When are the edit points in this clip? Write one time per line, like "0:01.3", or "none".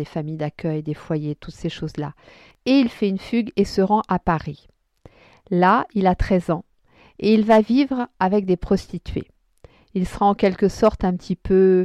none